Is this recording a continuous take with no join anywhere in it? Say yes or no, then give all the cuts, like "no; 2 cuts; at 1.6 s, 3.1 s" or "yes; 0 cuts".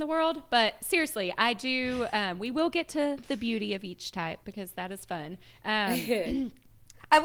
no; 2 cuts; at 4.4 s, 5.5 s